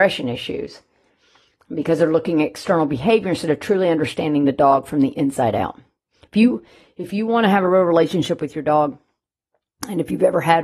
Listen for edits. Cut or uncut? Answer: uncut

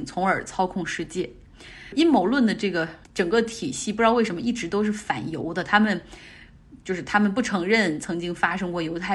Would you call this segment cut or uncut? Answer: cut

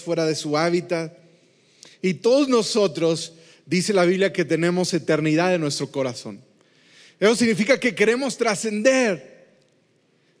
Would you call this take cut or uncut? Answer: uncut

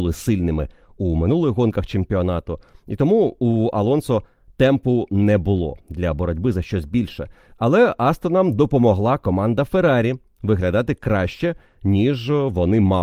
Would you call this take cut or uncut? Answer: uncut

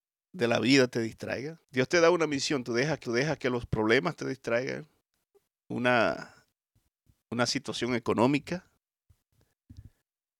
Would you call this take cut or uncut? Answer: cut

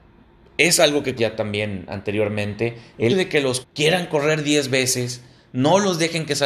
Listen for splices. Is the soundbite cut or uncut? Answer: cut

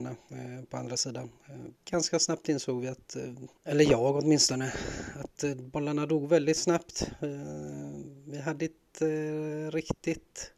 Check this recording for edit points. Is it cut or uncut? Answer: cut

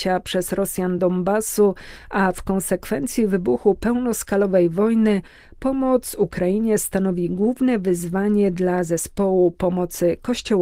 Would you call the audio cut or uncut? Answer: uncut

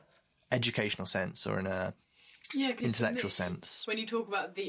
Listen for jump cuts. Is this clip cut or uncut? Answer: cut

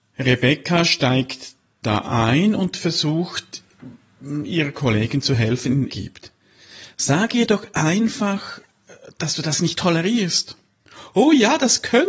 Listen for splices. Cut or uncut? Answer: cut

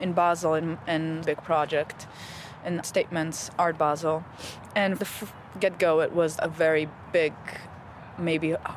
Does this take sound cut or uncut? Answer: cut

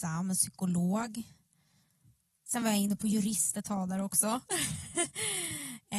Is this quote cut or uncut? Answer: uncut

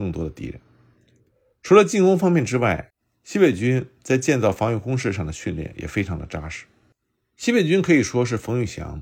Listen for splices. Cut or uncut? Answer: uncut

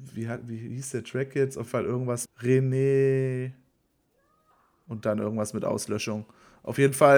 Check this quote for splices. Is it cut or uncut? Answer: cut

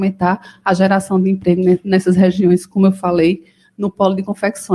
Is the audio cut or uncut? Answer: uncut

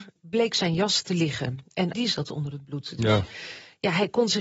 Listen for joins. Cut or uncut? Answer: cut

